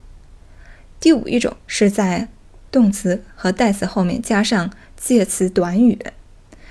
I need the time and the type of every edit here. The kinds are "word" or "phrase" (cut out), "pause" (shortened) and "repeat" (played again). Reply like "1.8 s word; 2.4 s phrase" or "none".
1.6 s pause